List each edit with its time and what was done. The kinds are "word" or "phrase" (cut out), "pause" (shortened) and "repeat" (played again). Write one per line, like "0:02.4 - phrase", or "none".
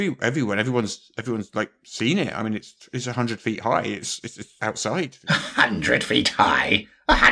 0:04.6 - word